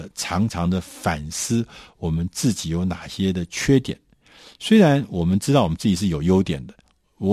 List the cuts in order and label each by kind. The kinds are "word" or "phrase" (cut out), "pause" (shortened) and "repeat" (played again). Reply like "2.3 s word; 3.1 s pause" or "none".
none